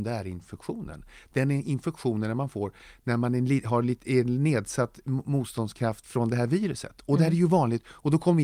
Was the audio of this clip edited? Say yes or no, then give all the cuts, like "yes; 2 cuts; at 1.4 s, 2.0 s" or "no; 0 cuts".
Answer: no; 0 cuts